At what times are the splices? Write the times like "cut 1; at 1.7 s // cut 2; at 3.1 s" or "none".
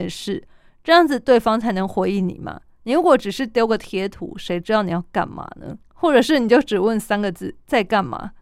cut 1; at 5.8 s

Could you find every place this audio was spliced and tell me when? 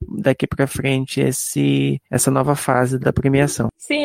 cut 1; at 2.0 s // cut 2; at 3.0 s

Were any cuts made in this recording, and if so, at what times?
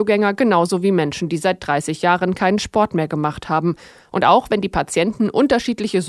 none

